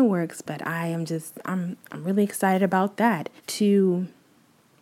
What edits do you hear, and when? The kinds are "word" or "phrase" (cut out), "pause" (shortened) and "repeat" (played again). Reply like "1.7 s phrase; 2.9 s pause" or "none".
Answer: 3.4 s pause